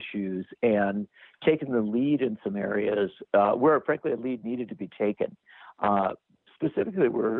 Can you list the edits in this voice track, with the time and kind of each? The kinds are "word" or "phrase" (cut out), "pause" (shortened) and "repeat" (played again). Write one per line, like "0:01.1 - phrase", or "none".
none